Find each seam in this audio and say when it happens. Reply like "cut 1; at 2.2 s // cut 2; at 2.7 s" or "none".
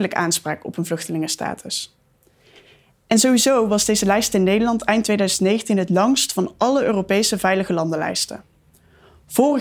none

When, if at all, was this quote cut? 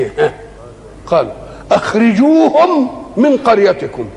none

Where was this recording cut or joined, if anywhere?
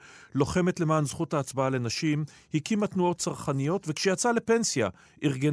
none

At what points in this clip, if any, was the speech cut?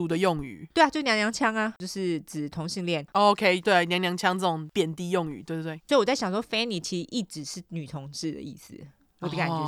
none

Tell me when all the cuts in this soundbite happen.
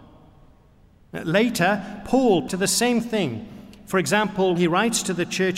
cut 1; at 2.5 s // cut 2; at 4.6 s

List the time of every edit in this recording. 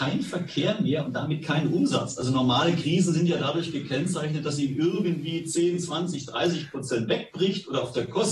none

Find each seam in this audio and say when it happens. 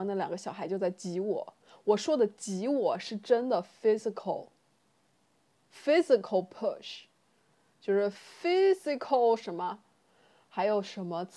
none

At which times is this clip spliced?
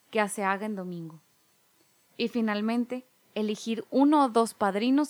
none

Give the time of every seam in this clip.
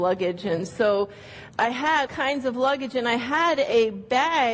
cut 1; at 1.5 s // cut 2; at 2.1 s

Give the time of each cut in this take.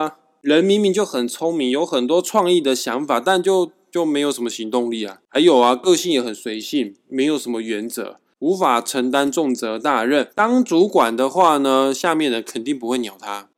cut 1; at 10.3 s

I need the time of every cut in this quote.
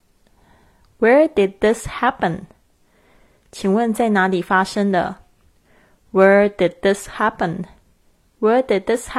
none

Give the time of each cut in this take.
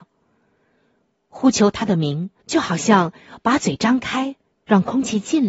cut 1; at 2.4 s // cut 2; at 4.6 s

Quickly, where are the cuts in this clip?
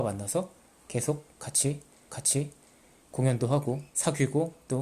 cut 1; at 2.0 s // cut 2; at 3.9 s

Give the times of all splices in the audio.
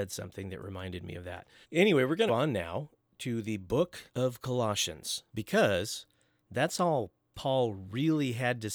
cut 1; at 1.6 s // cut 2; at 2.3 s // cut 3; at 4.1 s // cut 4; at 5.3 s

